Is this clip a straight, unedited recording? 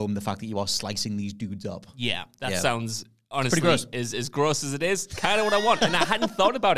yes; 0 cuts

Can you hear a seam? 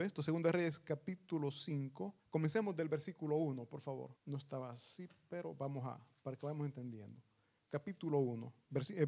yes; 2 cuts; at 2.2 s, 4.2 s

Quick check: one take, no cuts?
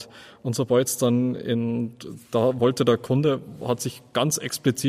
yes; 0 cuts

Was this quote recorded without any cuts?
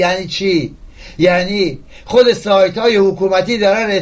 yes; 0 cuts

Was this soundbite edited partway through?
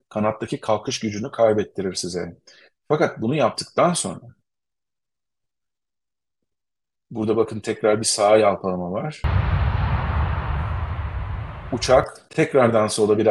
no; 0 cuts

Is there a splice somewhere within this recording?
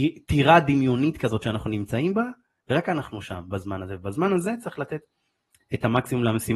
no; 0 cuts

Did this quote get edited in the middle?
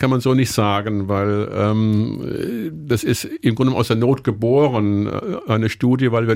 no; 0 cuts

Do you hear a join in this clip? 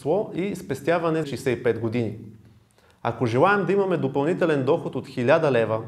yes; 1 cut; at 1.2 s

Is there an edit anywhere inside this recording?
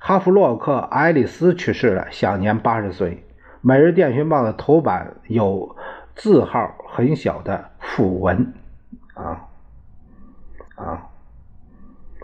yes; 1 cut; at 10.7 s

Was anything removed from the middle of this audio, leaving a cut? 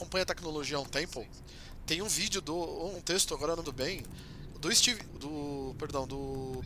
yes; 5 cuts; at 2.4 s, 3.0 s, 3.6 s, 4.5 s, 5.1 s

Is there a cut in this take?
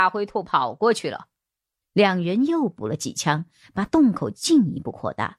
no; 0 cuts

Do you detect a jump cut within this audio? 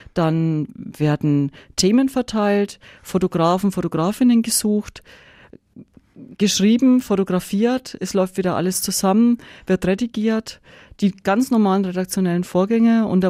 no; 0 cuts

